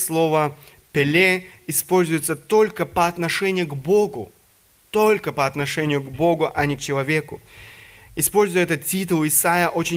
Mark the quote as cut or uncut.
uncut